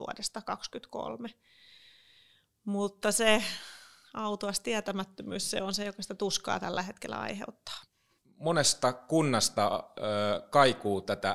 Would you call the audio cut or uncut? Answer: uncut